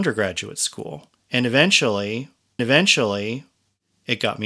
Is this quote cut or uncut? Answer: cut